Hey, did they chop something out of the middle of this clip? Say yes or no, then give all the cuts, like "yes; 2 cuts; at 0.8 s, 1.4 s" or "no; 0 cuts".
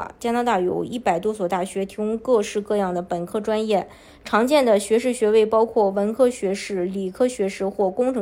no; 0 cuts